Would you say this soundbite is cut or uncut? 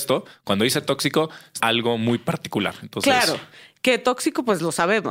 cut